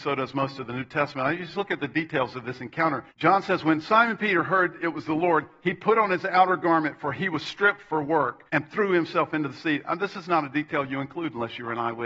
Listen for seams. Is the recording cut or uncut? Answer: cut